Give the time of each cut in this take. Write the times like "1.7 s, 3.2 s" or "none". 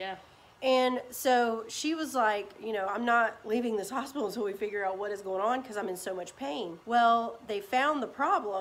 6.8 s